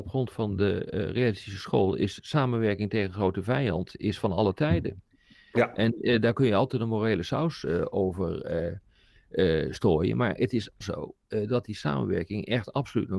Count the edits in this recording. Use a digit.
1